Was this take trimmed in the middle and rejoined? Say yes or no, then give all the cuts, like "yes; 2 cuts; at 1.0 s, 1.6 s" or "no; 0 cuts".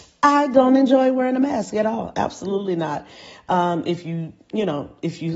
no; 0 cuts